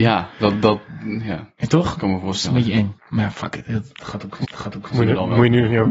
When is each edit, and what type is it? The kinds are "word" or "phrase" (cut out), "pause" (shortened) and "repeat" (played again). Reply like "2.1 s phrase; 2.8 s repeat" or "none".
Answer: 3.0 s pause; 4.4 s repeat